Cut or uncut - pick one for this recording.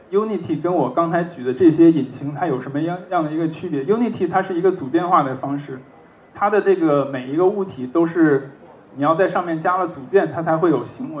uncut